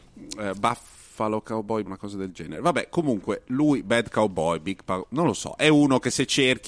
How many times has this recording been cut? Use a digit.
1